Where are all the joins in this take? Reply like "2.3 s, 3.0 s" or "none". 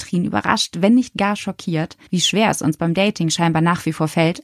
2.1 s